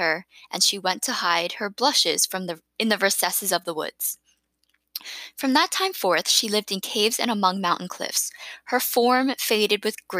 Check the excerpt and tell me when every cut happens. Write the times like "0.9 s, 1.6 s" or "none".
none